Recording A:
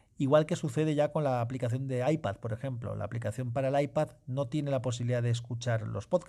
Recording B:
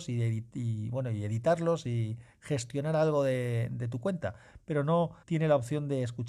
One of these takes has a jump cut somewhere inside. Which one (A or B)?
B